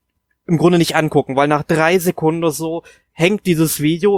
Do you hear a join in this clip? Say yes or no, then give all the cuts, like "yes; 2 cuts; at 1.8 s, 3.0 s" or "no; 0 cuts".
no; 0 cuts